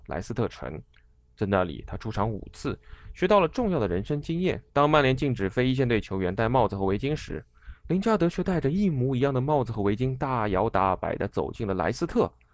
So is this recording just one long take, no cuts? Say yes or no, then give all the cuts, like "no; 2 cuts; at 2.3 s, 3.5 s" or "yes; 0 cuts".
no; 1 cut; at 4.7 s